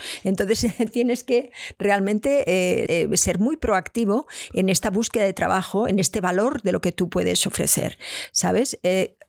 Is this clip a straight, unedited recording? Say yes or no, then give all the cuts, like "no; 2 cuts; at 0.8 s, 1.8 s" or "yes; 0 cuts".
no; 1 cut; at 2.9 s